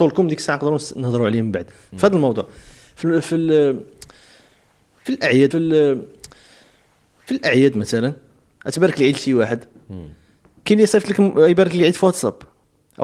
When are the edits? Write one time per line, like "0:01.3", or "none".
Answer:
0:05.5